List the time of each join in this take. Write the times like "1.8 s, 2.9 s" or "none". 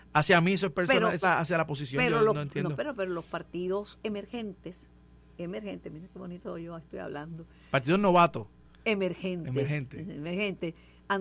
1.2 s